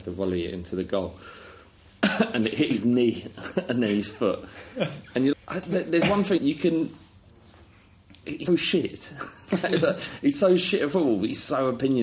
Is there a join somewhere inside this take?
yes; 3 cuts; at 5.3 s, 6.4 s, 8.5 s

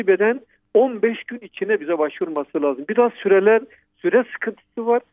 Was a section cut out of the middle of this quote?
no; 0 cuts

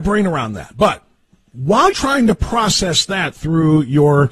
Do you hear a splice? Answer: yes; 1 cut; at 1.9 s

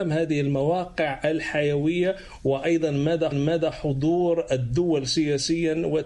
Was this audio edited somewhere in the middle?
yes; 1 cut; at 3.3 s

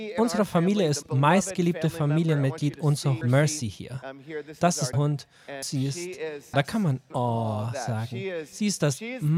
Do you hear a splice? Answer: yes; 6 cuts; at 1.0 s, 3.2 s, 4.9 s, 5.6 s, 6.5 s, 7.1 s

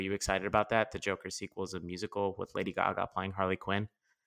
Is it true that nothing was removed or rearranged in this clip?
yes; 0 cuts

